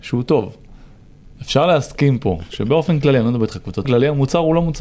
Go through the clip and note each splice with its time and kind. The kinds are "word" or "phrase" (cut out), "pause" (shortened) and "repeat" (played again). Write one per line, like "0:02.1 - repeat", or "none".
0:01.3 - pause
0:03.8 - phrase